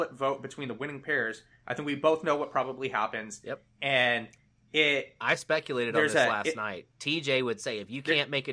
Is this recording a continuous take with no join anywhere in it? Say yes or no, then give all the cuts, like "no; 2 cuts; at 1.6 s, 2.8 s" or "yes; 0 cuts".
yes; 0 cuts